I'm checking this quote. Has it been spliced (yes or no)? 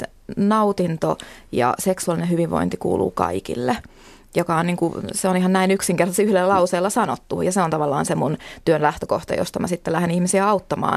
no